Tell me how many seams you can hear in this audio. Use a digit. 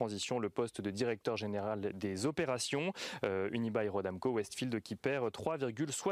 0